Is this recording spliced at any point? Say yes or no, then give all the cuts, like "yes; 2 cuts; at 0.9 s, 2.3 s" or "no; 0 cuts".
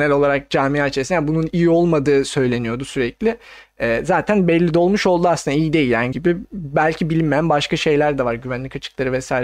yes; 1 cut; at 6.1 s